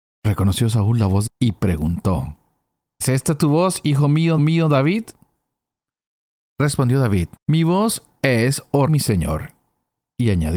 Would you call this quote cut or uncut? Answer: cut